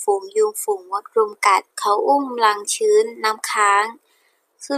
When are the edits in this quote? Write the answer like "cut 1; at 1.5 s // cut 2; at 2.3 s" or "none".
cut 1; at 1.7 s